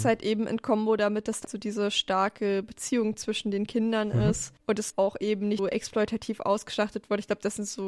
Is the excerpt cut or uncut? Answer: cut